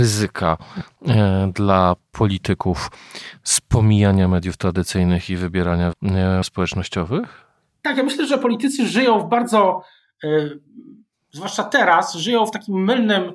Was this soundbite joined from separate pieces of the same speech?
yes; 2 cuts; at 5.9 s, 6.4 s

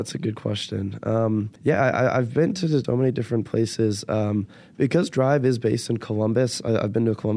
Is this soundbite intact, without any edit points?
no; 2 cuts; at 1.6 s, 2.8 s

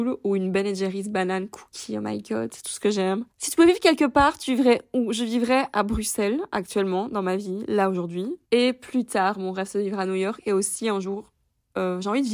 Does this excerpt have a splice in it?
yes; 2 cuts; at 3.3 s, 8.4 s

